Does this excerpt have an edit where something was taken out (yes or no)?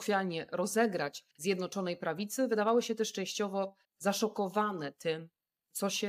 yes